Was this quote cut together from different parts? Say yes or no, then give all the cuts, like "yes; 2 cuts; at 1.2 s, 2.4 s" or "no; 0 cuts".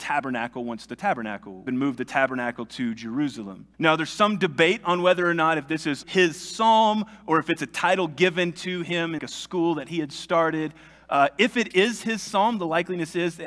yes; 4 cuts; at 1.7 s, 3.7 s, 6.0 s, 9.2 s